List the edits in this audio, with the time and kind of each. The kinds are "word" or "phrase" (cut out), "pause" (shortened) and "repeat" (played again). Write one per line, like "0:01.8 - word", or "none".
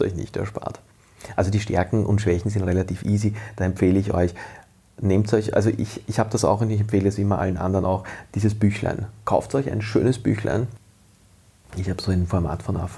none